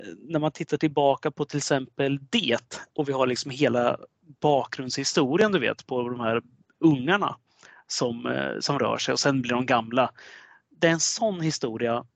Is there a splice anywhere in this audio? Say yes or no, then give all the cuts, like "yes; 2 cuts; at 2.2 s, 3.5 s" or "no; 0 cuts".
yes; 1 cut; at 2.9 s